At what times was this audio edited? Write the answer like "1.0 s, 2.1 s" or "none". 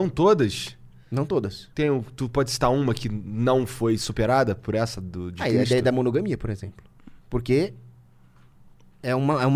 1.7 s, 7.2 s